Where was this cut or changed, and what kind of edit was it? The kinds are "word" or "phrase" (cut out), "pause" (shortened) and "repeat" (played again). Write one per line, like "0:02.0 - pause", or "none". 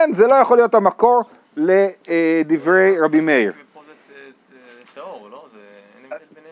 none